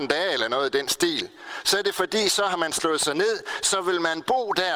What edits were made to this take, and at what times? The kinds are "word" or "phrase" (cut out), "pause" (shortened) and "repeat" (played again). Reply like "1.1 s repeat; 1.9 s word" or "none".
none